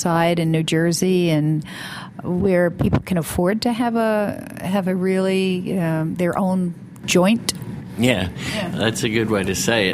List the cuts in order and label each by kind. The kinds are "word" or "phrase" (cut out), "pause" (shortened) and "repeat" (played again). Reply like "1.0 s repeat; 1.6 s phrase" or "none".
none

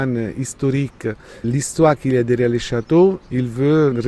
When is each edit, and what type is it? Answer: 1.4 s word

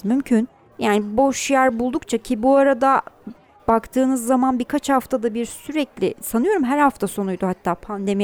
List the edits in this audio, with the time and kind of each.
none

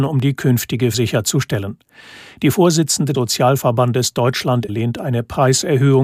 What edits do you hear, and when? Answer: 0.9 s word; 3.1 s word; 4.7 s word

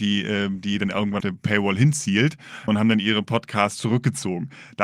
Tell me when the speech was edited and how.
1.2 s word; 2.7 s word

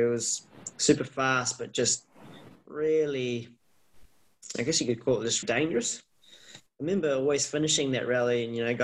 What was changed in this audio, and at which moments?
5.4 s word

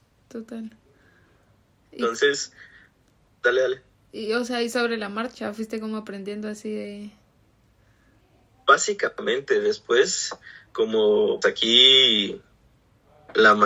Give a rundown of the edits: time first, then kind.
11.4 s word

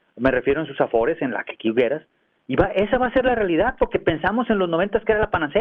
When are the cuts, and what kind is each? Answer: none

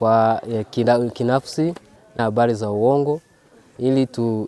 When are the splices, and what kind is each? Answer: 2.2 s phrase

